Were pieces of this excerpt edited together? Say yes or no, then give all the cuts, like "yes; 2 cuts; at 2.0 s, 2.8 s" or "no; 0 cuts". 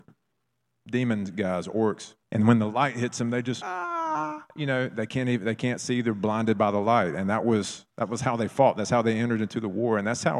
yes; 3 cuts; at 2.2 s, 3.6 s, 7.9 s